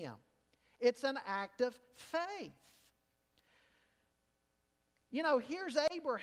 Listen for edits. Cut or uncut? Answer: uncut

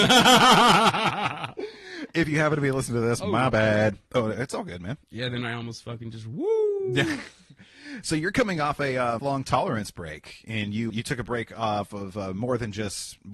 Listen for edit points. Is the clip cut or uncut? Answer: cut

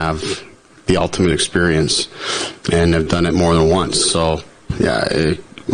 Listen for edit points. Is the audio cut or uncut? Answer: uncut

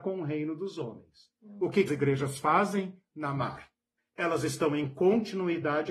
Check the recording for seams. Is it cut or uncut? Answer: cut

